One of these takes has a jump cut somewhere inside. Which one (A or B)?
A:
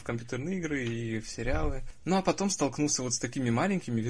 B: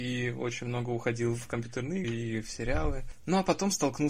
B